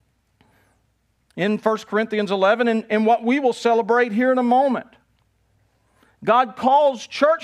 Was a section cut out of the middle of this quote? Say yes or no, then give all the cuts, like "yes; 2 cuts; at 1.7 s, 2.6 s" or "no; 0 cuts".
no; 0 cuts